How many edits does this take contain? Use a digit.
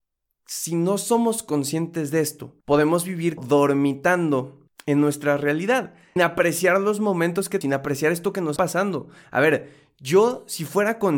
6